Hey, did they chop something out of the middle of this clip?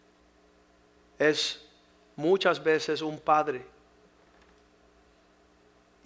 no; 0 cuts

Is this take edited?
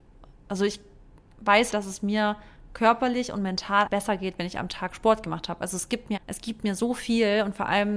yes; 3 cuts; at 1.7 s, 3.9 s, 6.2 s

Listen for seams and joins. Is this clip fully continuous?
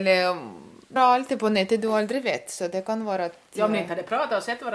no; 1 cut; at 1.0 s

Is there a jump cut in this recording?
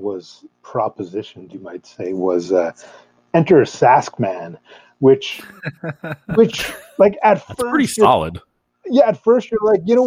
no; 0 cuts

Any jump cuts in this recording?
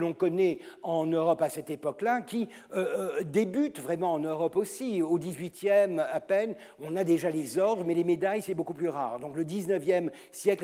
no; 0 cuts

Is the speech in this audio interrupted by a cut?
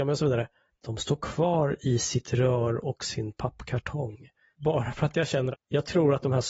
yes; 1 cut; at 5.5 s

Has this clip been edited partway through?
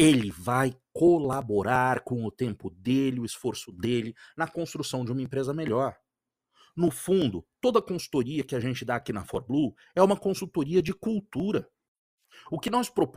no; 0 cuts

